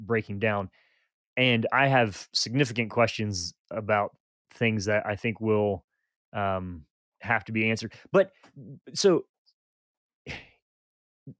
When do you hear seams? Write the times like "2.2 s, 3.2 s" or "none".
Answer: 7.1 s